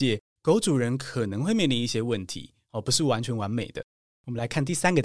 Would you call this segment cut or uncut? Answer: uncut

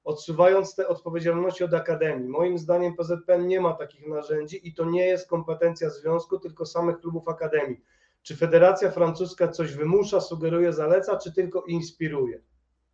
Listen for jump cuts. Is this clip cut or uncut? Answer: uncut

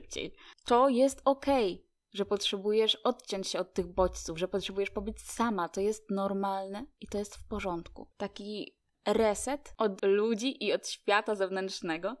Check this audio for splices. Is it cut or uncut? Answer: cut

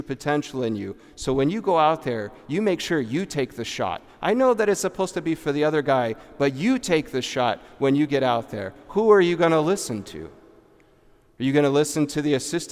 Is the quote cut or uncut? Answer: uncut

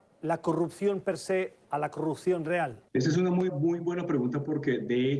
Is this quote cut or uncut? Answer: cut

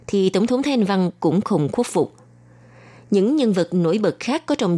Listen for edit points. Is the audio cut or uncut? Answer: uncut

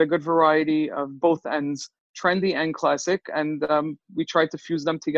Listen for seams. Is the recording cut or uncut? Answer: uncut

